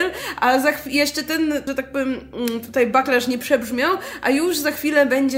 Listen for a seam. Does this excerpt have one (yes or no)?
yes